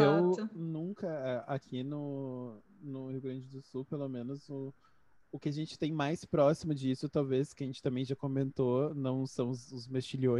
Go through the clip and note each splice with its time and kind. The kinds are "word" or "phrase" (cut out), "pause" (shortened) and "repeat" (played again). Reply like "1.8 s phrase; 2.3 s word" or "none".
none